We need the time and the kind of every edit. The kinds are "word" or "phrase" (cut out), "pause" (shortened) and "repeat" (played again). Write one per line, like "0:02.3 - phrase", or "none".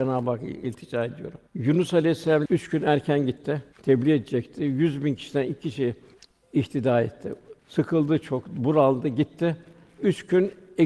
0:01.5 - pause
0:03.7 - pause
0:06.1 - pause
0:07.6 - pause